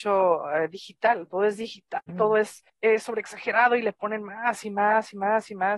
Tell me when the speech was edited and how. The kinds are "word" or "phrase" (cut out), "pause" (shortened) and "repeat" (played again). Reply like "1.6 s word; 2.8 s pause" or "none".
2.1 s word; 2.7 s pause